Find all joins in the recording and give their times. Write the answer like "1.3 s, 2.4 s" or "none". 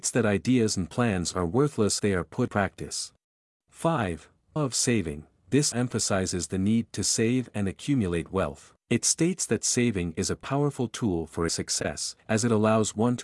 2.0 s, 2.5 s, 3.2 s, 4.6 s, 5.7 s, 8.8 s, 11.5 s, 12.2 s